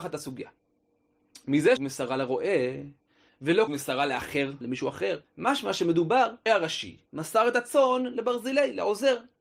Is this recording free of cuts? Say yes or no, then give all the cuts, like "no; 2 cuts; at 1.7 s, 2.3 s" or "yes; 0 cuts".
no; 6 cuts; at 1.8 s, 3.7 s, 4.6 s, 5.2 s, 6.5 s, 7.1 s